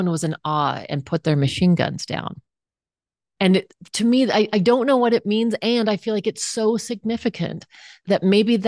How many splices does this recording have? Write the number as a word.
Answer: zero